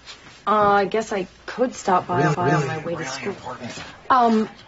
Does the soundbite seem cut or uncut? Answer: cut